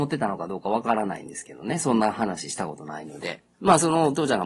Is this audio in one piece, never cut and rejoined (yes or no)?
no